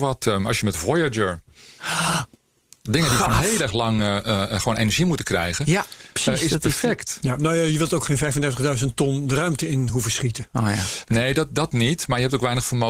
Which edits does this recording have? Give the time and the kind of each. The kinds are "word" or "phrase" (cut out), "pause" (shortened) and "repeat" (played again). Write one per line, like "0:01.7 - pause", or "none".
none